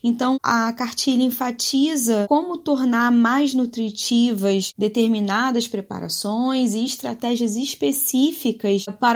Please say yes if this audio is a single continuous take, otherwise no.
yes